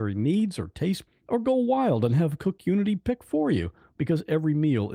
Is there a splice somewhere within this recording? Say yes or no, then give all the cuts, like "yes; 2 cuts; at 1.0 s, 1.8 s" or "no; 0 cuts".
yes; 1 cut; at 1.1 s